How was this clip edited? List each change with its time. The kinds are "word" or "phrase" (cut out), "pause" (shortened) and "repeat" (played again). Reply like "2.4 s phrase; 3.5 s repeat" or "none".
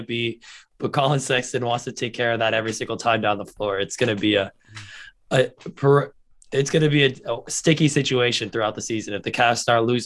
none